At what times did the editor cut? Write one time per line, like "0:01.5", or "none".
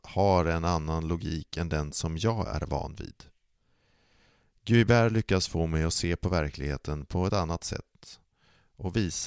none